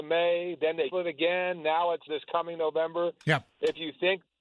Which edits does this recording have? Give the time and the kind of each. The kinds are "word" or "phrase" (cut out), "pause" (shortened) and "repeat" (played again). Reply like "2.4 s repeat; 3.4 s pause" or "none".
0.9 s word; 2.1 s word